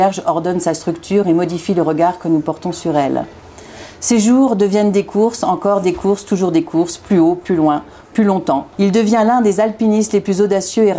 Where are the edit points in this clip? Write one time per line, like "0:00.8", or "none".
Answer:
0:08.7